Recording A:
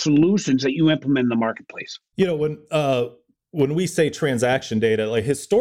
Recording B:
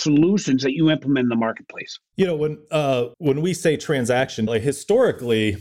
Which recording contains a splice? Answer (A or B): B